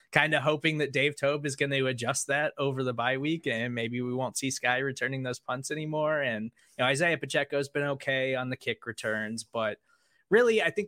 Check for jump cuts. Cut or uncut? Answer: cut